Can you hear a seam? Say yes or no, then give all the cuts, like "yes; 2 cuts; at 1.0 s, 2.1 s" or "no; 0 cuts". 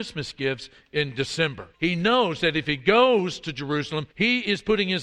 yes; 2 cuts; at 1.7 s, 4.1 s